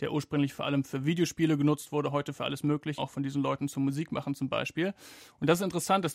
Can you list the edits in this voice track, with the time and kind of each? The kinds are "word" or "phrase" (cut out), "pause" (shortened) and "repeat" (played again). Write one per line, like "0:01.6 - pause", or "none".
0:03.0 - word